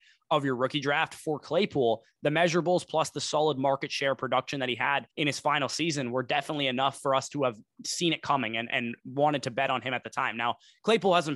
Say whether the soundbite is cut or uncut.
cut